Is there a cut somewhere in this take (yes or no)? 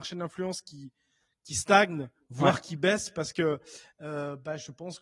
no